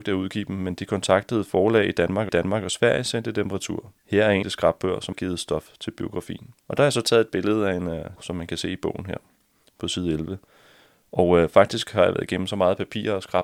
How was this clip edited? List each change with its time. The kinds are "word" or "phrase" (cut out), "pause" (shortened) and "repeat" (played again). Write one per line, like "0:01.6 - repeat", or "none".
0:02.3 - repeat
0:04.0 - pause
0:04.4 - phrase
0:05.1 - word
0:06.6 - pause
0:08.2 - word